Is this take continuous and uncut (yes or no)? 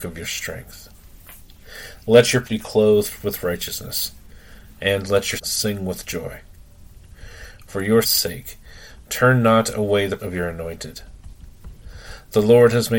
no